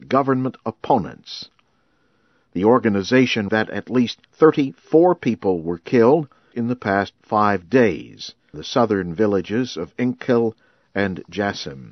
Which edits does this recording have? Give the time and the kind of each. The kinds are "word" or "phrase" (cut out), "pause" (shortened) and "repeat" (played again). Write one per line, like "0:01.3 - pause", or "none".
0:03.5 - word
0:04.2 - pause
0:06.5 - word
0:08.5 - word